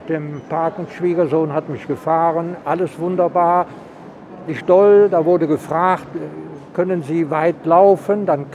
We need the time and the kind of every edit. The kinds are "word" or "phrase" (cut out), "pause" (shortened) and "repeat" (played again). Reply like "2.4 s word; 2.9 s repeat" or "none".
4.5 s word